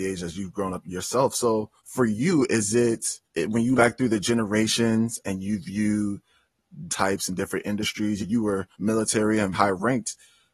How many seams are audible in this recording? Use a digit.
7